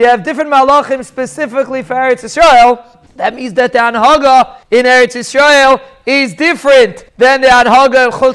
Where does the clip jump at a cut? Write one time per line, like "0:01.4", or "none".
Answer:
0:03.1
0:04.6
0:07.1